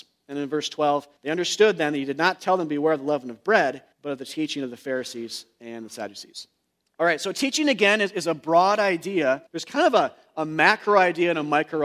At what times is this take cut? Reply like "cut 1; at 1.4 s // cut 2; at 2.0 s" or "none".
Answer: cut 1; at 1.2 s // cut 2; at 3.9 s // cut 3; at 6.7 s // cut 4; at 9.5 s